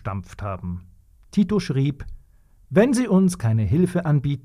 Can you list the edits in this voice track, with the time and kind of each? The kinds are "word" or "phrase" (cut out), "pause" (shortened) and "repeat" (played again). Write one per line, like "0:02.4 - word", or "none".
none